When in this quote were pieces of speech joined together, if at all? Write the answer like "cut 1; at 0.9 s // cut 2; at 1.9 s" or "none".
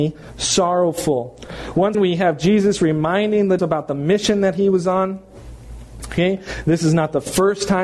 cut 1; at 1.9 s // cut 2; at 3.6 s